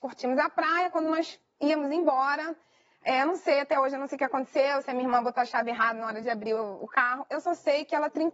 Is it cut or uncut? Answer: uncut